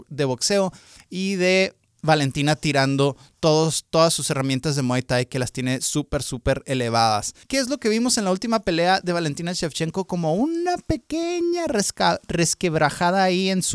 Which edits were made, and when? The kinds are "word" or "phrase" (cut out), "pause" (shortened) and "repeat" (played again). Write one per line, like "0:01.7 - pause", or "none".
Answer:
0:01.8 - pause
0:07.4 - pause

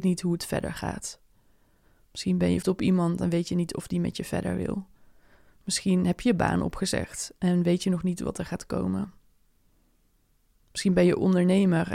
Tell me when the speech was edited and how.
0:02.6 - word

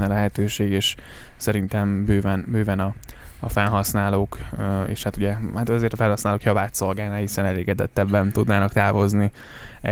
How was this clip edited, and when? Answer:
none

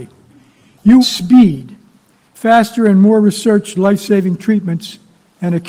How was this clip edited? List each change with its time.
0:01.0 - word
0:03.7 - word

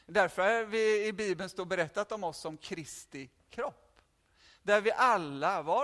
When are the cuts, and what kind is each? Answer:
none

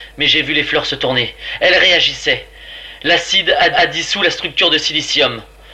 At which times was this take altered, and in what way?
0:03.7 - repeat

